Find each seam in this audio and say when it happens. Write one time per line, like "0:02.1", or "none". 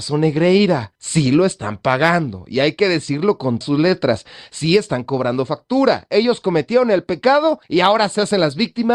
0:01.0
0:03.6
0:07.6